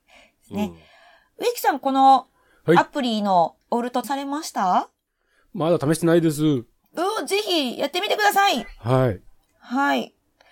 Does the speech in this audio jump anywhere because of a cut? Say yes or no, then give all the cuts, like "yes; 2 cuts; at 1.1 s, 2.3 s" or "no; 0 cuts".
yes; 2 cuts; at 3.6 s, 4.0 s